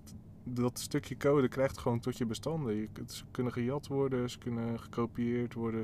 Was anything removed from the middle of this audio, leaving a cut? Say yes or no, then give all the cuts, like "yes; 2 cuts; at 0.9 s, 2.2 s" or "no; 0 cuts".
yes; 1 cut; at 2.0 s